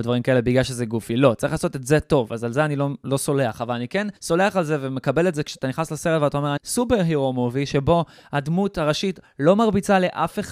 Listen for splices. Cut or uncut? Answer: cut